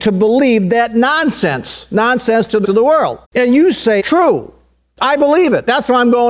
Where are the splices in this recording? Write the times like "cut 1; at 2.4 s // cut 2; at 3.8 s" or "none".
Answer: cut 1; at 2.6 s // cut 2; at 3.2 s // cut 3; at 4.0 s